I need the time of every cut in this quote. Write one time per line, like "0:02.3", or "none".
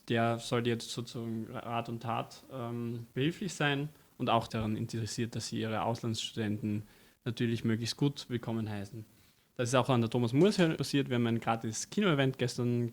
0:04.5
0:10.8